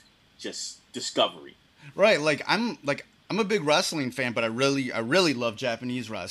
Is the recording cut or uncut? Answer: uncut